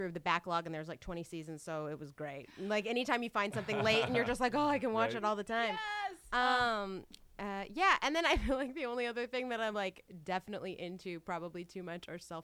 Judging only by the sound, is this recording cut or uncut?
uncut